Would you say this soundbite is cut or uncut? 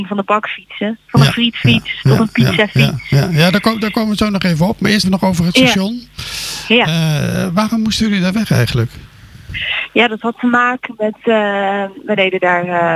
cut